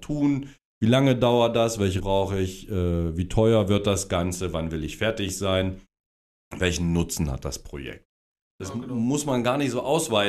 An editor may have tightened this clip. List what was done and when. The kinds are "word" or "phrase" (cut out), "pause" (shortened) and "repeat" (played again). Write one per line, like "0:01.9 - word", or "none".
0:02.0 - word